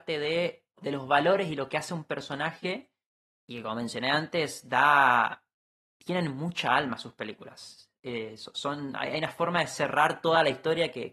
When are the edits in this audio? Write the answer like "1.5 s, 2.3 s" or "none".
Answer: 3.4 s, 5.7 s